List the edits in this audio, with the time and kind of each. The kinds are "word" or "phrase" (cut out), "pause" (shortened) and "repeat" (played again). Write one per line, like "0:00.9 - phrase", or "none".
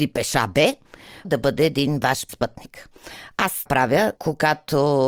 0:01.2 - word
0:02.3 - word
0:03.7 - word
0:04.2 - word